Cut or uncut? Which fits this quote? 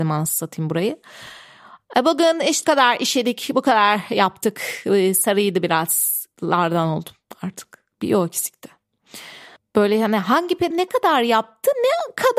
cut